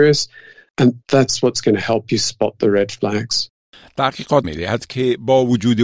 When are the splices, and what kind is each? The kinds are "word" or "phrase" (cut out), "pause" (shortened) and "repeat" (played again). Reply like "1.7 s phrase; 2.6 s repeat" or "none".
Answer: 4.4 s word